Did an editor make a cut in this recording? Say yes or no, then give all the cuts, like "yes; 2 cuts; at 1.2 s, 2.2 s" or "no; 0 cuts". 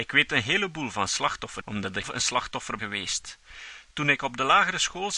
yes; 3 cuts; at 1.6 s, 2.0 s, 2.8 s